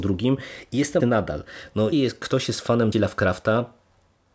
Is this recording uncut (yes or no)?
no